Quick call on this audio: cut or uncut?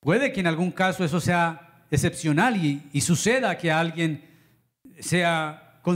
uncut